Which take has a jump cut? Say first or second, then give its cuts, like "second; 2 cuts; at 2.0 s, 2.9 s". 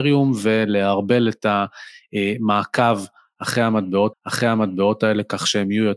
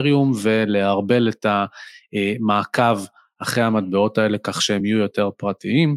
first; 1 cut; at 4.1 s